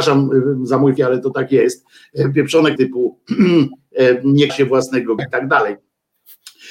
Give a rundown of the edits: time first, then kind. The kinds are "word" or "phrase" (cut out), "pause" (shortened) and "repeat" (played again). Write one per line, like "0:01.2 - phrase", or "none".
0:01.0 - word
0:02.8 - word
0:04.5 - word
0:05.2 - word